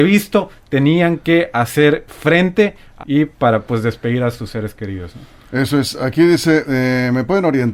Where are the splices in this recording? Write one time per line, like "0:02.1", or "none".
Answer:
0:03.0